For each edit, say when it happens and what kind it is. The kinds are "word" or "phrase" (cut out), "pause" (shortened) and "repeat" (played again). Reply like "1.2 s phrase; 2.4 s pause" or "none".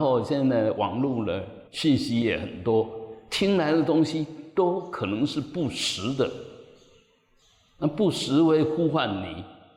1.7 s pause